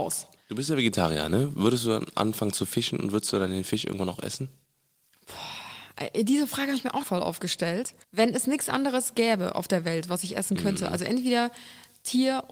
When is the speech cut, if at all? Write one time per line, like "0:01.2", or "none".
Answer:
0:07.0
0:08.0